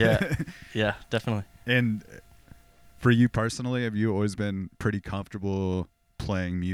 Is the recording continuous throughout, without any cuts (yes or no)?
yes